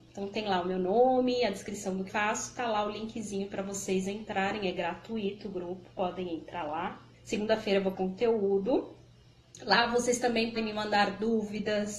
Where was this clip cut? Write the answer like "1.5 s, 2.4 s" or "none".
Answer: 2.1 s, 7.1 s, 7.9 s, 10.6 s